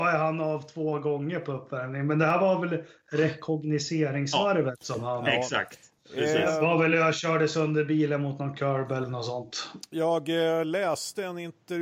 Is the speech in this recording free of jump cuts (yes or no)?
yes